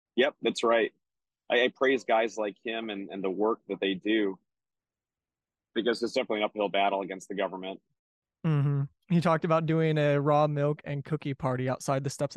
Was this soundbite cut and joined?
no; 0 cuts

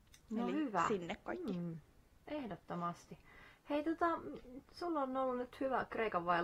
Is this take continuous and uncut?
yes; 0 cuts

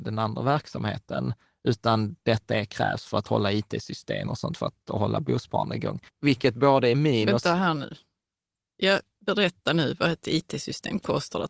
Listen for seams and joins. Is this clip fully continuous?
no; 2 cuts; at 4.3 s, 6.1 s

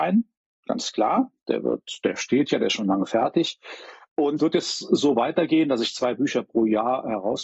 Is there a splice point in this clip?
yes; 1 cut; at 4.4 s

